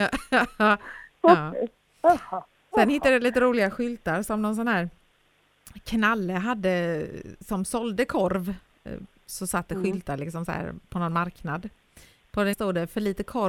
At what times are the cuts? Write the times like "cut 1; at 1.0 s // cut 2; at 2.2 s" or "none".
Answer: cut 1; at 12.5 s